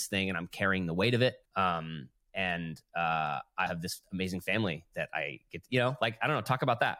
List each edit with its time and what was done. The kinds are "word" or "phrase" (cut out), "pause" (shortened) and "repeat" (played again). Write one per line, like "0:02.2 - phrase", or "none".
0:01.4 - pause
0:03.7 - word

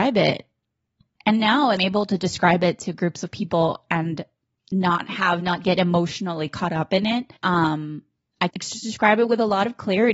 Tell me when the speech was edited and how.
0:01.8 - word
0:07.4 - pause
0:08.5 - word

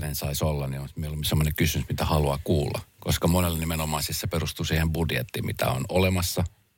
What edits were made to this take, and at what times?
none

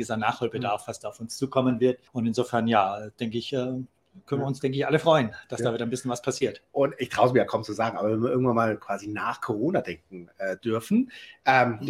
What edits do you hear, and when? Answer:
0:02.1 - pause

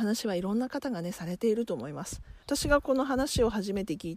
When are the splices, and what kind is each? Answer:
0:02.4 - pause

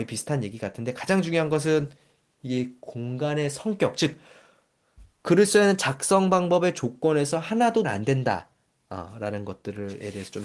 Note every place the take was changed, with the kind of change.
0:07.8 - word

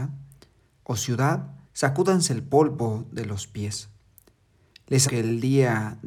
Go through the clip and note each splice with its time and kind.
0:01.6 - pause
0:05.1 - word

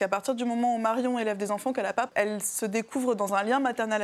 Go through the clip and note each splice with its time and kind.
0:02.1 - word

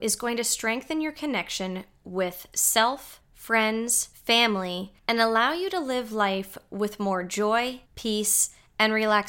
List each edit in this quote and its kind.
0:05.0 - pause
0:07.9 - pause

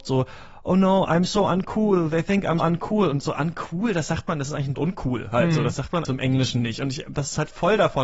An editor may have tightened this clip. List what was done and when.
0:02.6 - word
0:04.7 - phrase
0:06.0 - word

